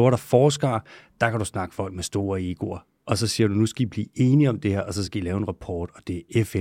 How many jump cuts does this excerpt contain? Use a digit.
0